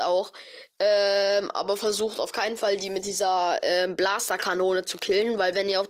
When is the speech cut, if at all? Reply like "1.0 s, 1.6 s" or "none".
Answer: none